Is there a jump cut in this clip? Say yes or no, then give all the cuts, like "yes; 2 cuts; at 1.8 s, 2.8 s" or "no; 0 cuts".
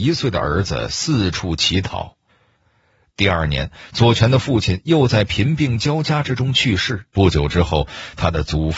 yes; 1 cut; at 7.1 s